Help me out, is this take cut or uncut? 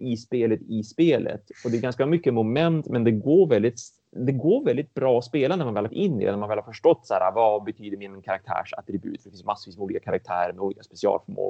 cut